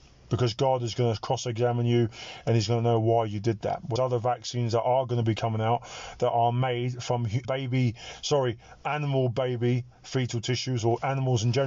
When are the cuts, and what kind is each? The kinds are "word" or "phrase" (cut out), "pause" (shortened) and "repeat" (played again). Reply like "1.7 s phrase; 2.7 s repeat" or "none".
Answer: 4.0 s word; 7.4 s word